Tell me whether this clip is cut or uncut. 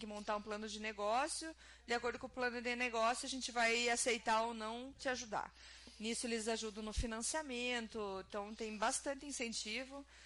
uncut